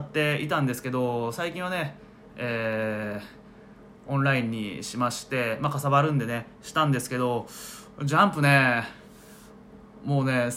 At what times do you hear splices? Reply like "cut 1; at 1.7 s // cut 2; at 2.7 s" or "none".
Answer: none